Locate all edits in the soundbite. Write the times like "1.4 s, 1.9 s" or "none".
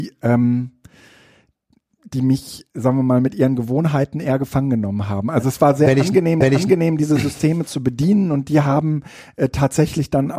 2.7 s, 6.4 s